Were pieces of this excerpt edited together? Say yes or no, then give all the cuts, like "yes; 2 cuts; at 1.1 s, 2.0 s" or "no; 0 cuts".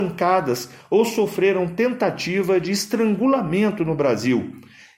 no; 0 cuts